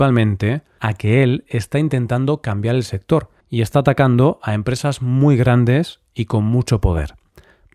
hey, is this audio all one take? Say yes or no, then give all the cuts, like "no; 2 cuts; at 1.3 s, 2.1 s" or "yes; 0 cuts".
no; 1 cut; at 3.4 s